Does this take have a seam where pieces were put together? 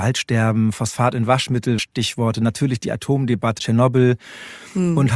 yes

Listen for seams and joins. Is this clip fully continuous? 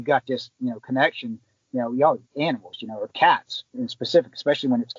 yes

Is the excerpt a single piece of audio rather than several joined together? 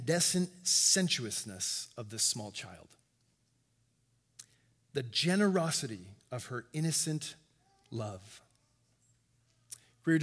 yes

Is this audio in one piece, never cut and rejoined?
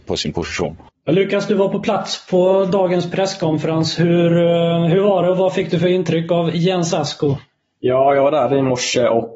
yes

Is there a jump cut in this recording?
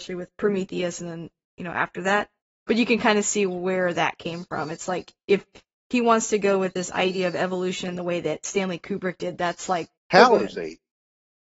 yes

